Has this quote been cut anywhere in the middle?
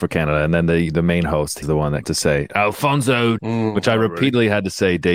yes; 3 cuts; at 1.6 s, 2.0 s, 3.4 s

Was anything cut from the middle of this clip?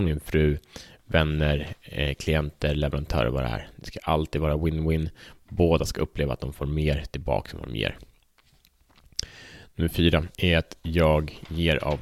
yes; 1 cut; at 10.3 s

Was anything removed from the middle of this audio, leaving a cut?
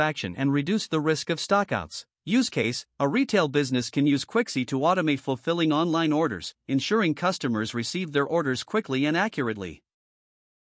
yes; 1 cut; at 2.1 s

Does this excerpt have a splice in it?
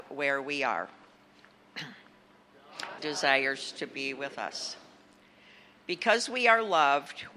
yes; 1 cut; at 3.0 s

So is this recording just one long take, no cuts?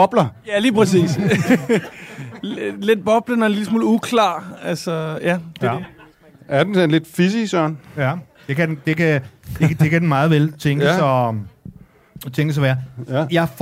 yes; 0 cuts

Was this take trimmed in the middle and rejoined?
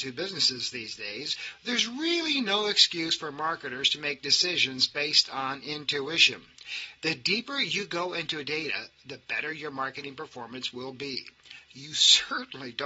no; 0 cuts

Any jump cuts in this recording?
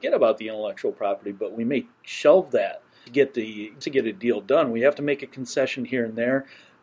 yes; 3 cuts; at 1.9 s, 3.1 s, 3.8 s

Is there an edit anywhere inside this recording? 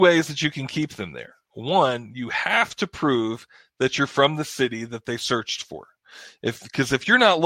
no; 0 cuts

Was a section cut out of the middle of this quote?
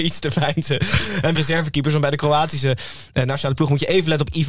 yes; 1 cut; at 1.3 s

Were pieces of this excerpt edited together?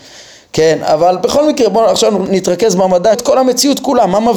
yes; 1 cut; at 3.1 s

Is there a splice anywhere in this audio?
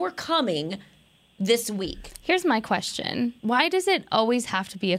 yes; 1 cut; at 3.4 s

